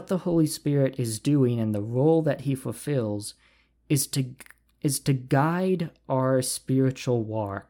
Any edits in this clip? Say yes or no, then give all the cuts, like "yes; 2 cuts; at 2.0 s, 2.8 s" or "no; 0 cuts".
no; 0 cuts